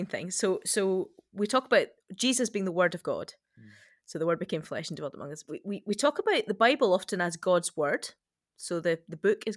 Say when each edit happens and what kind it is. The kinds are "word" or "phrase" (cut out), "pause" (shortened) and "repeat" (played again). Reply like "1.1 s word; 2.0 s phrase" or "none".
none